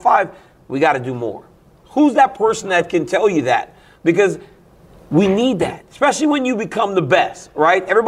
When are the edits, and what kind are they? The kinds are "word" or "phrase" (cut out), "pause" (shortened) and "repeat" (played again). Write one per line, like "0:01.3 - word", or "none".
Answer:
none